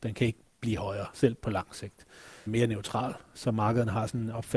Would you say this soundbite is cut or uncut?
cut